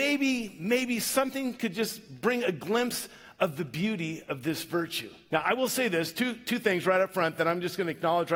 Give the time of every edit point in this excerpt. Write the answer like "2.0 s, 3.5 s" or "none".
none